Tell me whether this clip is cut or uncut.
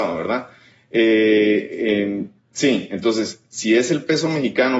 uncut